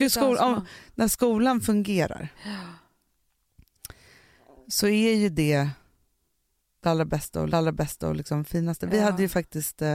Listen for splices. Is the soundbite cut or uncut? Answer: cut